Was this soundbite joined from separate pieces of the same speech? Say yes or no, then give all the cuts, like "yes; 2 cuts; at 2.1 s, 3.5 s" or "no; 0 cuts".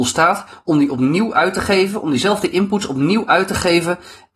no; 0 cuts